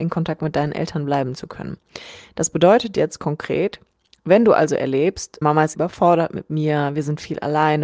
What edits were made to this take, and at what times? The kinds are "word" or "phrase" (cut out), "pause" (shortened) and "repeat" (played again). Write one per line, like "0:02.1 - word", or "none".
0:05.4 - word
0:05.7 - word